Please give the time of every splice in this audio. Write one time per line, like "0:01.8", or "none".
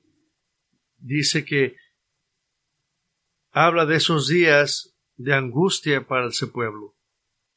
none